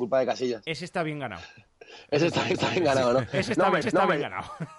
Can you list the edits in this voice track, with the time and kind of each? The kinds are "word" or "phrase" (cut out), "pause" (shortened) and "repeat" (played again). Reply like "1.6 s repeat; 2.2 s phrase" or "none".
2.5 s repeat; 3.8 s repeat